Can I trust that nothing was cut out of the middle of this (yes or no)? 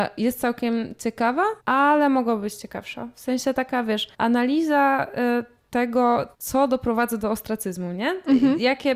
no